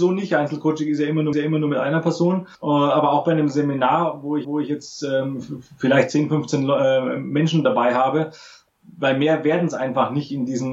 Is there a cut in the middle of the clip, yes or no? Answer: yes